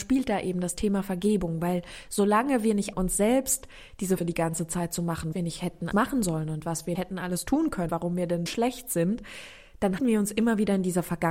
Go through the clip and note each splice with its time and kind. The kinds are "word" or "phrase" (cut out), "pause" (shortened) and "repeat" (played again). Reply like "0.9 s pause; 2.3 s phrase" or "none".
2.9 s word; 4.2 s word; 5.3 s word; 5.9 s word; 6.9 s word; 7.9 s word; 8.5 s word; 10.0 s word